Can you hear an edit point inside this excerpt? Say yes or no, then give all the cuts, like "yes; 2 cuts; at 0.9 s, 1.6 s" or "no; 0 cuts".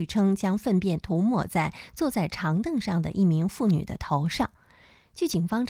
no; 0 cuts